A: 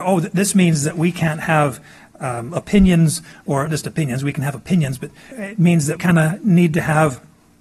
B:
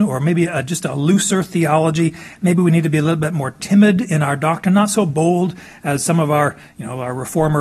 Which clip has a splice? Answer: A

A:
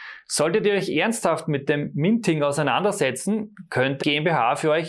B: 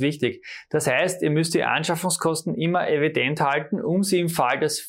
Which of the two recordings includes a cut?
A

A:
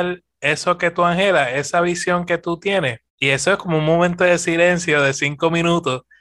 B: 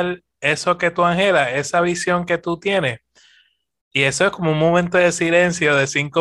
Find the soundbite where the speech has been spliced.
A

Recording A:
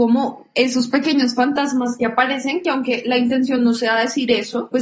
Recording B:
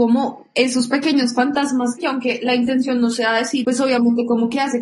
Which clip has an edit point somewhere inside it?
B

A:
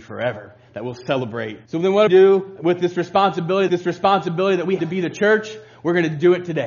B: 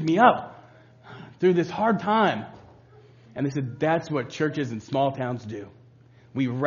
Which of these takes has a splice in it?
A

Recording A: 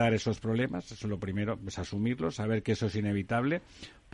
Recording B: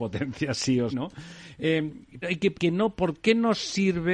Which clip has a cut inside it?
B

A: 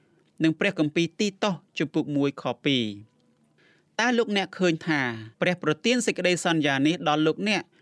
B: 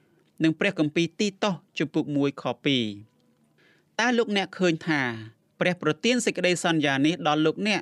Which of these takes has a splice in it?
A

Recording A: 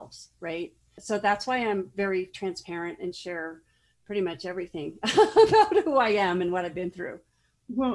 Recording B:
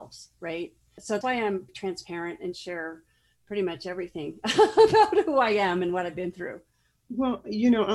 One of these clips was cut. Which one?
B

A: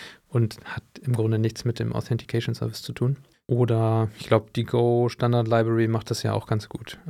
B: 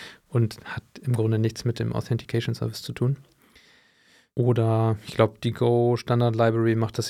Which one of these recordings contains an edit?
A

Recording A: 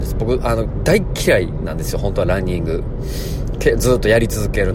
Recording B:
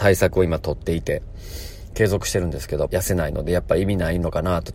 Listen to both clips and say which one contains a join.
B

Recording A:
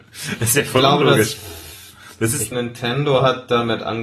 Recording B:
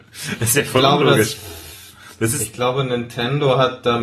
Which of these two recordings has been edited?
A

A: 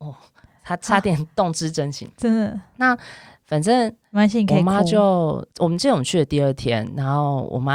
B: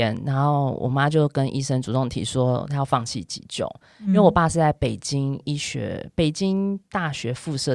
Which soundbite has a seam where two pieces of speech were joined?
A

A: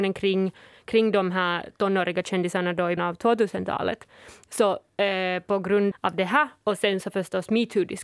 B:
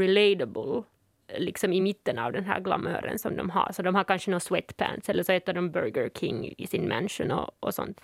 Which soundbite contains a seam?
A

